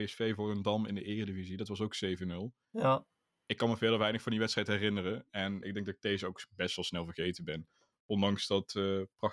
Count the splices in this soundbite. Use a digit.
1